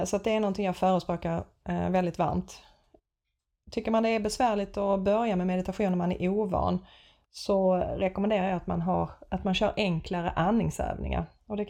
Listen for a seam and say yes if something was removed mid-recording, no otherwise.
no